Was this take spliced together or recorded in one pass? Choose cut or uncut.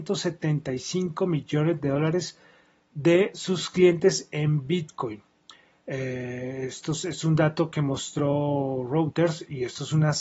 uncut